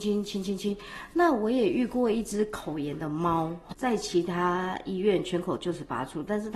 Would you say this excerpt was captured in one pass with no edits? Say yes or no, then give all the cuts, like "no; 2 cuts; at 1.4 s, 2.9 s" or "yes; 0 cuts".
no; 1 cut; at 3.7 s